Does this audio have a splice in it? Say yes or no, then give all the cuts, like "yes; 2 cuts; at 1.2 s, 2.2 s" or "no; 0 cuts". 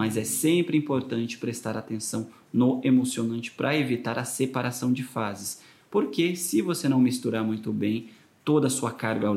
no; 0 cuts